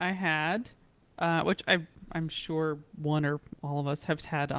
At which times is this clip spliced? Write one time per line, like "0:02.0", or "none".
none

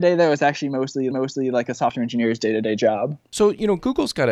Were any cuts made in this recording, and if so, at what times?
0:01.1

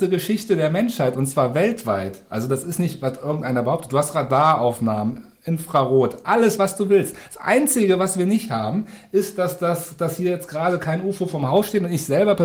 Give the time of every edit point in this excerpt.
none

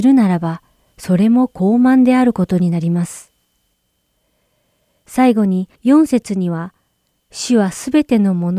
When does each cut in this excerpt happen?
0:05.8

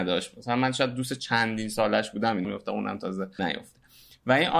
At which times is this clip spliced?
0:02.4
0:03.4

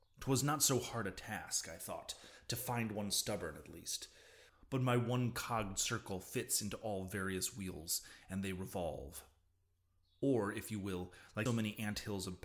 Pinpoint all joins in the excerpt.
0:11.5

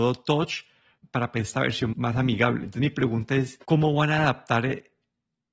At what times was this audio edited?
0:01.0
0:01.9
0:03.6

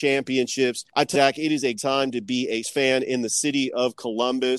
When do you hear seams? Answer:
0:01.1
0:01.8
0:02.6

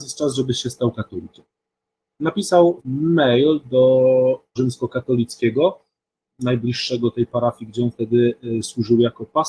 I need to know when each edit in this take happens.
0:02.8
0:04.6

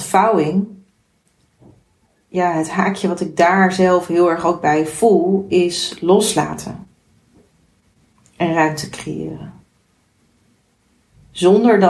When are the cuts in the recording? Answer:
none

